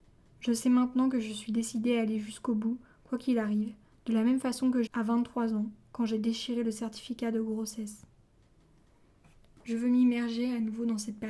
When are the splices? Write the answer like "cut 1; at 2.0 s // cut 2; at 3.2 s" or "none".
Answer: cut 1; at 4.9 s